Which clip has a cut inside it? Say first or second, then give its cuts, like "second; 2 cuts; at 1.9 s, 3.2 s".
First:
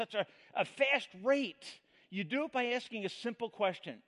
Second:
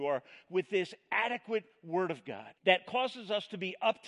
second; 1 cut; at 2.6 s